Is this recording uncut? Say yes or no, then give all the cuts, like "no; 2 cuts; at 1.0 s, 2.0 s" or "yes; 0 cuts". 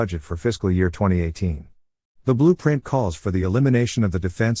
yes; 0 cuts